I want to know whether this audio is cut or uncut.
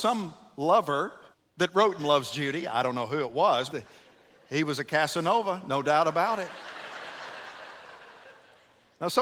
cut